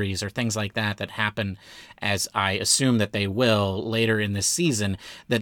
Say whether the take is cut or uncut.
uncut